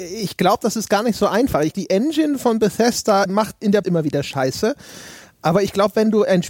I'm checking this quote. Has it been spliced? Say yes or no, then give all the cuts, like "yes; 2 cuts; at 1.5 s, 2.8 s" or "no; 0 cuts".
yes; 3 cuts; at 1.7 s, 3.3 s, 3.8 s